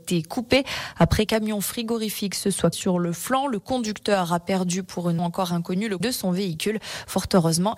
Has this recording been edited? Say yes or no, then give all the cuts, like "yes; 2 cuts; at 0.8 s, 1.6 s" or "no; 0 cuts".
yes; 4 cuts; at 1.3 s, 2.7 s, 5.2 s, 6.0 s